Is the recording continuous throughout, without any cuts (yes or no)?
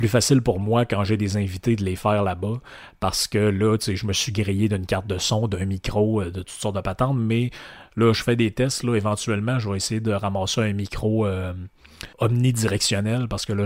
no